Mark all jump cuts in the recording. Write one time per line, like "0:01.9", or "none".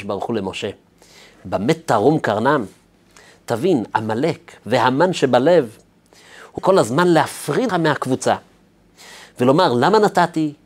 0:04.6
0:06.6
0:07.7